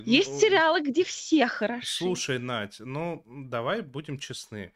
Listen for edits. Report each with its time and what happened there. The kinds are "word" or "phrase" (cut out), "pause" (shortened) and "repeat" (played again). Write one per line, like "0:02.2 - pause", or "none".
none

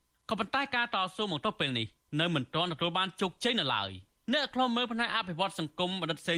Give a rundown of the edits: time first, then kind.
none

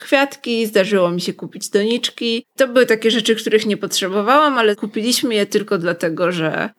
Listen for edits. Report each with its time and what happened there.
none

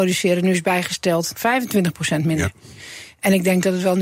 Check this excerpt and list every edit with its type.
0:01.3 - word

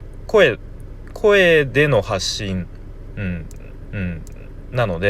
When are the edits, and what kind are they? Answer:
0:03.9 - repeat

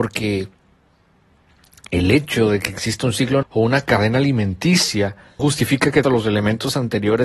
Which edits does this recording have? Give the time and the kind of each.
0:03.4 - word
0:05.4 - word
0:06.0 - word

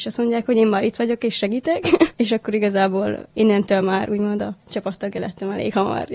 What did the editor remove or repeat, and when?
none

